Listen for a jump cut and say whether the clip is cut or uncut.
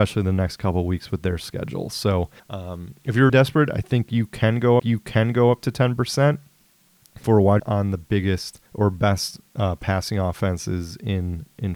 cut